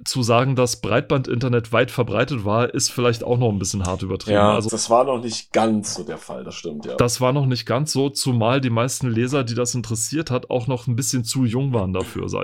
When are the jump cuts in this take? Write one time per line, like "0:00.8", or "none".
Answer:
0:04.7